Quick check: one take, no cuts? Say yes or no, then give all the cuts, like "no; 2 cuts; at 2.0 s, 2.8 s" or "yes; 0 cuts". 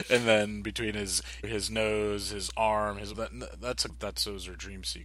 no; 3 cuts; at 1.4 s, 3.1 s, 3.9 s